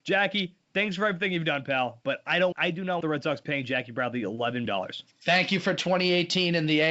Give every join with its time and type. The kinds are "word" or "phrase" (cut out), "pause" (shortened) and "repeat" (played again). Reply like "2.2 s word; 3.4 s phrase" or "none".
2.5 s word; 3.0 s word; 4.7 s word